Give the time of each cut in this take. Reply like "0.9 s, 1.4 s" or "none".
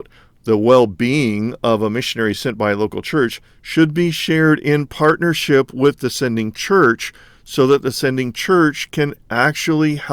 none